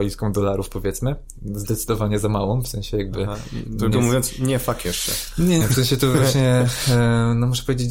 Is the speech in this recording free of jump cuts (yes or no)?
no